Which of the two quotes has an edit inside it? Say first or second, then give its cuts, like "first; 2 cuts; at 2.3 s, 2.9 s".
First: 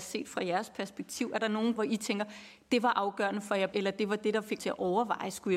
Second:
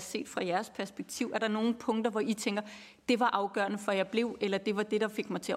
first; 3 cuts; at 1.8 s, 3.7 s, 4.6 s